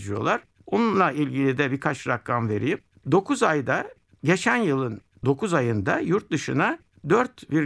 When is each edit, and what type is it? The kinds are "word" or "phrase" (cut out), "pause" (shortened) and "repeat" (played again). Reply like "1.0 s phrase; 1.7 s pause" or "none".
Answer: none